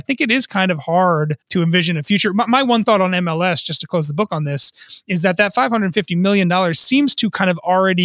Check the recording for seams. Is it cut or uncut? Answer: cut